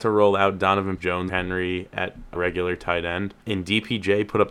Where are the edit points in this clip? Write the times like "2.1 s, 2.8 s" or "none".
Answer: 1.0 s, 1.3 s, 2.4 s, 3.4 s